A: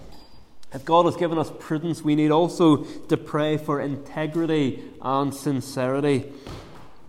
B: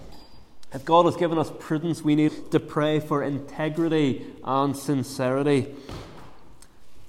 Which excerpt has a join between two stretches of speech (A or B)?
B